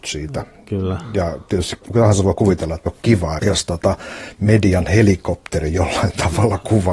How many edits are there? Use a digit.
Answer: 3